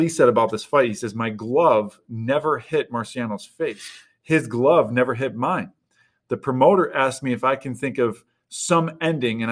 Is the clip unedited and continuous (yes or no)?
yes